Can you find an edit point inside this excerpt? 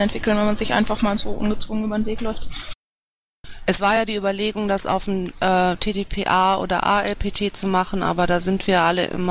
no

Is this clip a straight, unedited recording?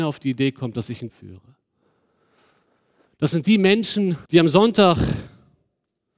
no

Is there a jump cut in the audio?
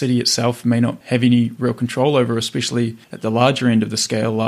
yes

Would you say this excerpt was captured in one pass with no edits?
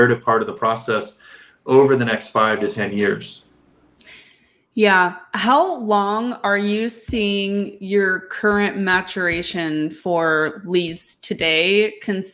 yes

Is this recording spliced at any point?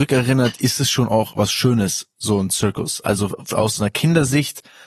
no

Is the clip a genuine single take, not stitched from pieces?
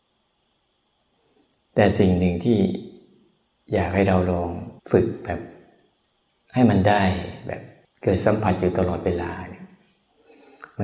no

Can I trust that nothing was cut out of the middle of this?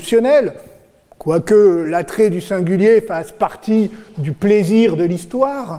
yes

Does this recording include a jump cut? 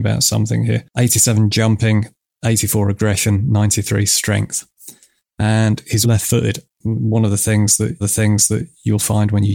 yes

